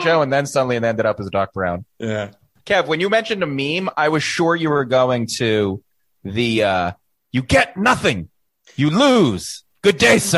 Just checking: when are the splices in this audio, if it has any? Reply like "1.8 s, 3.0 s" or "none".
none